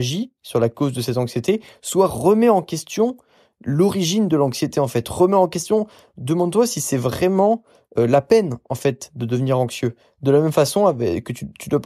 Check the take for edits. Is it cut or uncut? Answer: uncut